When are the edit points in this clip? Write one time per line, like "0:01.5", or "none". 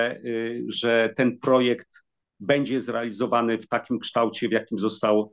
0:02.2

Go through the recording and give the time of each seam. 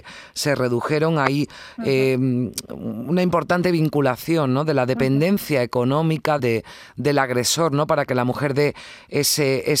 0:06.4

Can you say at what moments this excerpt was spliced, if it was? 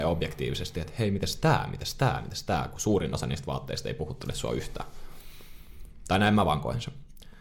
none

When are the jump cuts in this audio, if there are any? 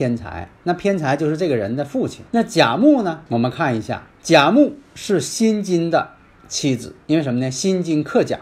0:02.3
0:03.3
0:04.1
0:06.3

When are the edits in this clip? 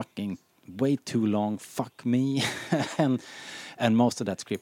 none

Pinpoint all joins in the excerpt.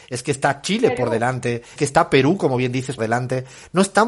0:01.8
0:03.0

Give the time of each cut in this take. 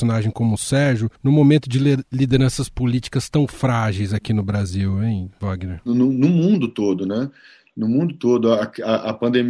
0:01.2

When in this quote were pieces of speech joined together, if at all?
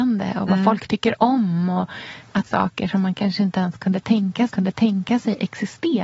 0:02.5
0:04.5

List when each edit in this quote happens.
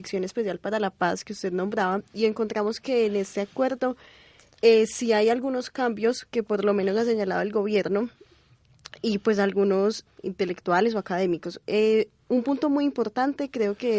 0:10.1

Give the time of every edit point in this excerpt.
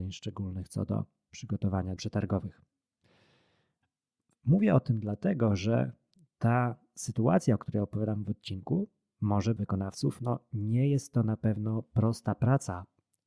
0:02.0
0:09.6

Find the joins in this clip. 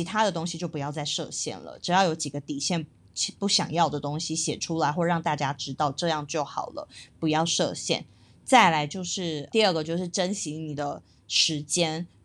0:09.5

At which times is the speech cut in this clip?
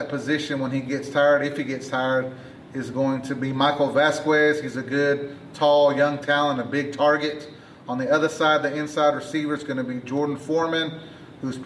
none

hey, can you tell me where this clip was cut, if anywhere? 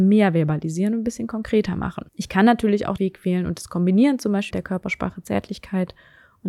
0:02.1
0:03.0
0:04.5

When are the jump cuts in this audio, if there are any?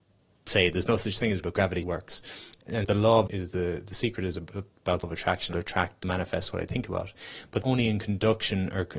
0:01.4
0:01.8
0:02.8
0:03.3
0:05.0
0:05.5
0:06.0
0:07.6

